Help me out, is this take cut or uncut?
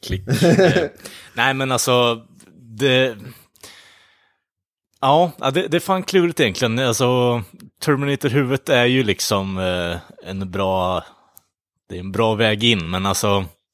uncut